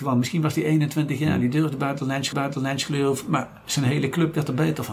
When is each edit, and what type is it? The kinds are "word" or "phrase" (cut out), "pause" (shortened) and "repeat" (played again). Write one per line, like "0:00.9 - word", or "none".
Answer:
0:02.3 - repeat